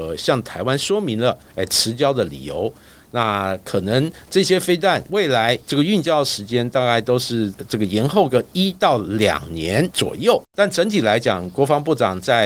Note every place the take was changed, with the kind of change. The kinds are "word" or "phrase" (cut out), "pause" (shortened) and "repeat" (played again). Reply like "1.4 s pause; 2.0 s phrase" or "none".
1.5 s pause; 5.6 s pause; 10.5 s pause